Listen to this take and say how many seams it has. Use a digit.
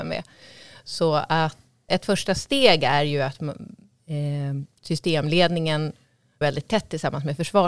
2